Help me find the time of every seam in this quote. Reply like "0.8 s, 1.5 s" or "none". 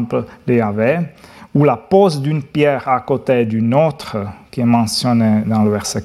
none